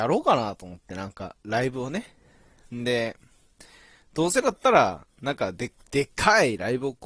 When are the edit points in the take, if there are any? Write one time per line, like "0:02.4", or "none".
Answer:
none